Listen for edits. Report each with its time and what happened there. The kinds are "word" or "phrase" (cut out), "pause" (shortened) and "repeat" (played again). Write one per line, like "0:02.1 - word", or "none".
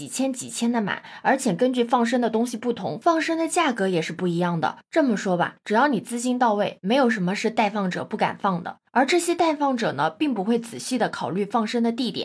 0:08.9 - pause